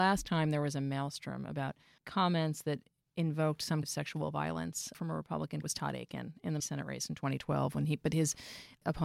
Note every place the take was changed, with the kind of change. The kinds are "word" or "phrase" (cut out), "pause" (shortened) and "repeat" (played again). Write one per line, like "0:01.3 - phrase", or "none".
0:02.0 - word
0:03.8 - word
0:04.9 - word
0:05.6 - word
0:06.6 - word